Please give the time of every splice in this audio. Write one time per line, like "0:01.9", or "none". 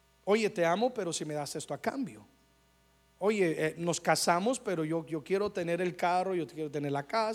none